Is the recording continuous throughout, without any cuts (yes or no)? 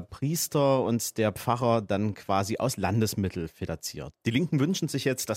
yes